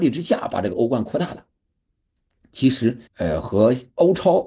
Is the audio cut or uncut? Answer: cut